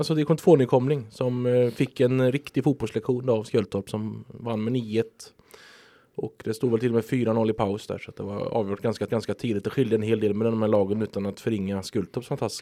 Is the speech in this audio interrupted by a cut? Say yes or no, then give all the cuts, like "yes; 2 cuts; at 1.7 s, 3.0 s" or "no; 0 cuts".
yes; 1 cut; at 9.1 s